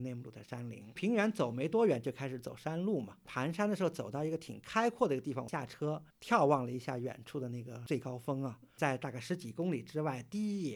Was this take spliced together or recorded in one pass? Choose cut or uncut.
cut